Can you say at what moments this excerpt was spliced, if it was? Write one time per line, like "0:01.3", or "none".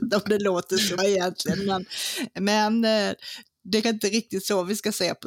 0:01.0
0:03.8